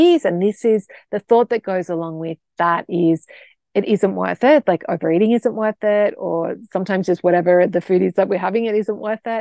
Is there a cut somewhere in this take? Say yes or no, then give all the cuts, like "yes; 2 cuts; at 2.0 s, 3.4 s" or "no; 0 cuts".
no; 0 cuts